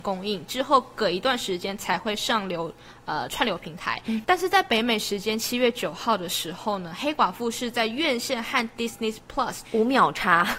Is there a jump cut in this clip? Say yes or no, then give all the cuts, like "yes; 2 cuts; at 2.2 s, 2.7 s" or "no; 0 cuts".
yes; 1 cut; at 9.6 s